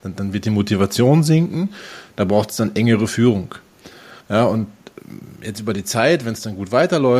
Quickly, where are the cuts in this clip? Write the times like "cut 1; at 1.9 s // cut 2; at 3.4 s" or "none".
cut 1; at 4.2 s